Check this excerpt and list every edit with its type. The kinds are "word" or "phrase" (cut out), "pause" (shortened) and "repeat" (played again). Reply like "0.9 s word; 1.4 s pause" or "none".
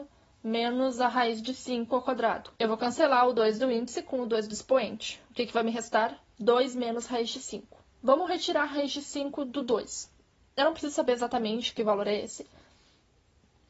2.5 s pause; 7.9 s pause